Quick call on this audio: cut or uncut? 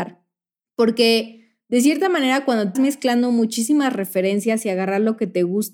cut